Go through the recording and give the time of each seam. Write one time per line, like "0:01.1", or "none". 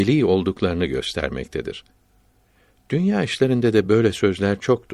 none